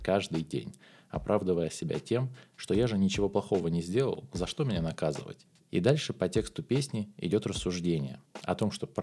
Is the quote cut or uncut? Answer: uncut